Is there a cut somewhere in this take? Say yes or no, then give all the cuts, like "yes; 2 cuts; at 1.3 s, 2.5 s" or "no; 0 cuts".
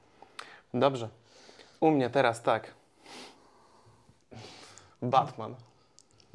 no; 0 cuts